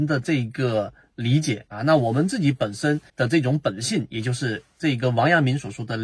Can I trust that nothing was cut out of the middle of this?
no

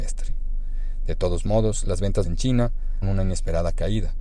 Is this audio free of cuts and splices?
no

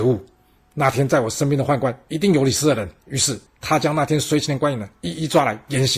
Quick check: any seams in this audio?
yes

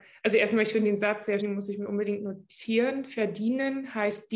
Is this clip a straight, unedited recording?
no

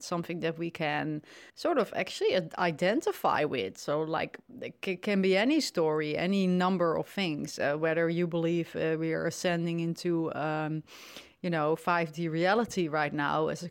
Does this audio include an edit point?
yes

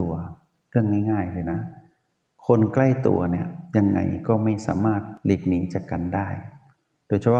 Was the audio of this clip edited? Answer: no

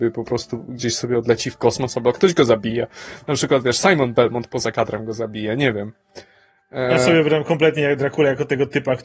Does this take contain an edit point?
no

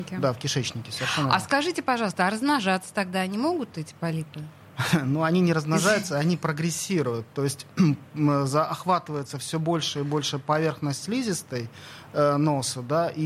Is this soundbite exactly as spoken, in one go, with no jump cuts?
yes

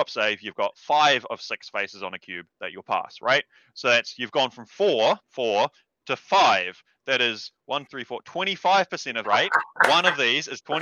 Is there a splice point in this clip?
yes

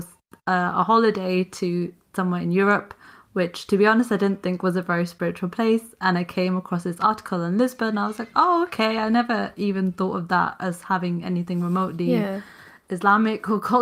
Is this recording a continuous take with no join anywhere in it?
yes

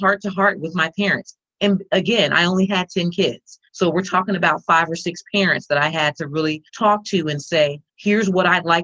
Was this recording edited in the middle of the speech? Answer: yes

